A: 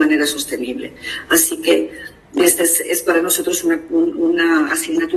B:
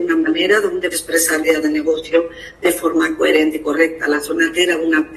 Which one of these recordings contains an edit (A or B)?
B